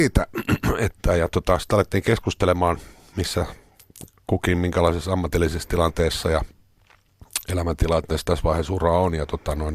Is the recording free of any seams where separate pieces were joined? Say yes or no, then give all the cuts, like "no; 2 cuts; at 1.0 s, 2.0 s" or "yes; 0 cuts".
yes; 0 cuts